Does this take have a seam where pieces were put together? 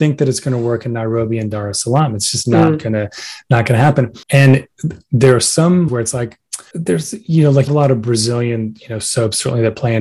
yes; 4 cuts; at 4.2 s, 5.9 s, 6.7 s, 7.7 s

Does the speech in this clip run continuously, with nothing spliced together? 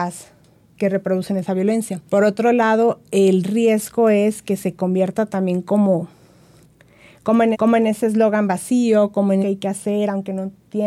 no; 3 cuts; at 2.1 s, 7.5 s, 9.4 s

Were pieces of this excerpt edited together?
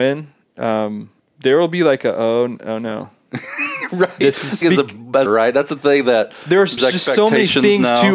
yes; 4 cuts; at 1.2 s, 4.6 s, 5.3 s, 6.8 s

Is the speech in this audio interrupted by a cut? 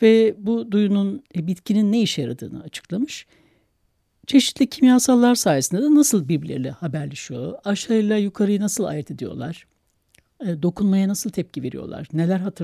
no; 0 cuts

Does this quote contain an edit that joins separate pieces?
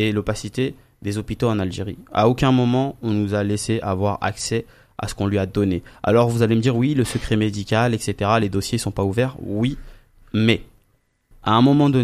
no; 0 cuts

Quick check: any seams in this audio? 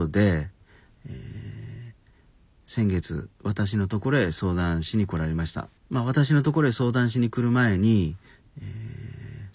yes; 1 cut; at 5.8 s

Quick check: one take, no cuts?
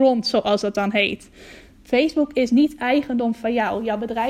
yes; 0 cuts

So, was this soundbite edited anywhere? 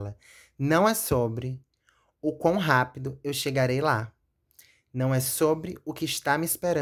no; 0 cuts

